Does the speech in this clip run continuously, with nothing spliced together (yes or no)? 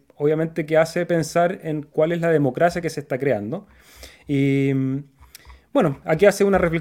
yes